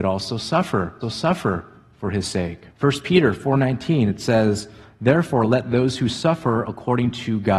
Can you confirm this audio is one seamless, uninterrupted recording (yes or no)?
no